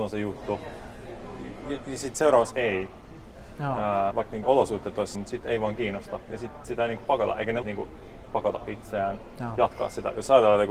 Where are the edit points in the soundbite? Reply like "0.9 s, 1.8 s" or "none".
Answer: 2.5 s, 4.1 s, 4.4 s, 5.1 s, 6.6 s, 7.6 s, 8.3 s